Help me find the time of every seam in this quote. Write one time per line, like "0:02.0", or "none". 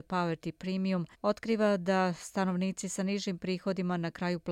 0:01.1